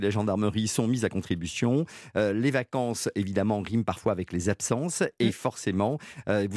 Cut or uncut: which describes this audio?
uncut